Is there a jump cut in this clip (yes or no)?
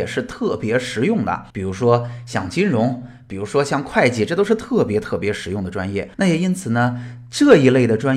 yes